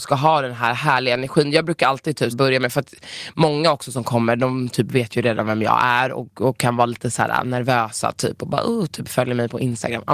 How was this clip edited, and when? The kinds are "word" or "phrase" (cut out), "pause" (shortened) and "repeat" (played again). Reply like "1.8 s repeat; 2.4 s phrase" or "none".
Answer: 2.3 s word

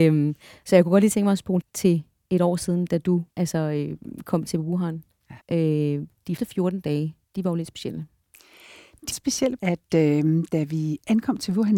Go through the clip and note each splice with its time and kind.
1.6 s word; 3.3 s pause; 5.4 s pause; 6.4 s word; 7.2 s pause; 9.1 s phrase; 9.6 s phrase

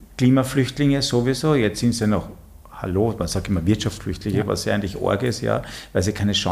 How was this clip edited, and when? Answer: none

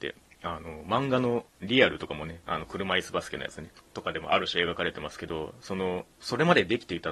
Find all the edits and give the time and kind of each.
1.5 s pause; 2.4 s pause

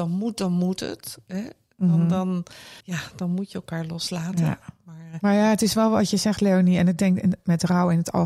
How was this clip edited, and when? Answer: 2.8 s pause

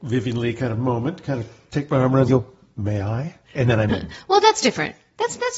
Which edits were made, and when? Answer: 2.3 s word; 3.9 s word

